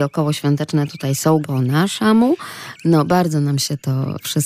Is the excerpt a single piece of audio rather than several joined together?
no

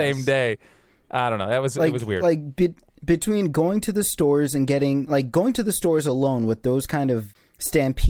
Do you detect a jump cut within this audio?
no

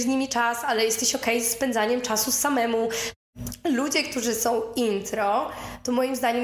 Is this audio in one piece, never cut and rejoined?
yes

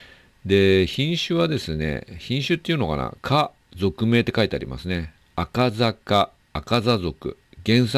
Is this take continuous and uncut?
no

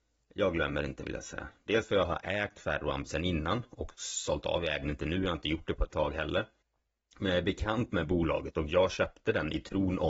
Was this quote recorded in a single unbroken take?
no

